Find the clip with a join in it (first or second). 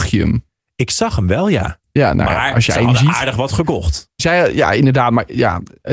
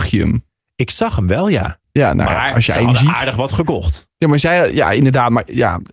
first